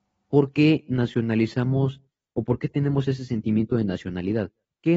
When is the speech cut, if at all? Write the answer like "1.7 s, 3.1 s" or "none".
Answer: none